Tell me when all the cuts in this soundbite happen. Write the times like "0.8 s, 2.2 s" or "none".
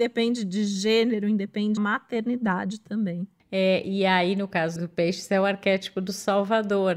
1.8 s, 4.8 s